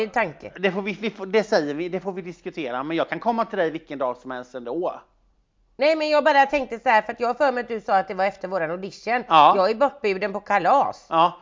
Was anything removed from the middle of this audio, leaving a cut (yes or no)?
no